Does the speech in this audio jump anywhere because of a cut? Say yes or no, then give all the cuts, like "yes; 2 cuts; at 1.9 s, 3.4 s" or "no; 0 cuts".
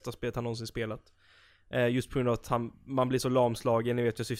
no; 0 cuts